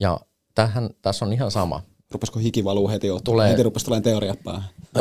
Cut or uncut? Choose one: uncut